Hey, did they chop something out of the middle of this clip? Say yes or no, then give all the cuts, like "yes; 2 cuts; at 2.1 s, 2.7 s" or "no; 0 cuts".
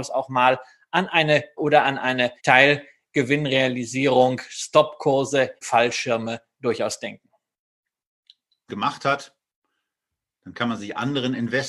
yes; 4 cuts; at 1.6 s, 2.4 s, 5.6 s, 8.7 s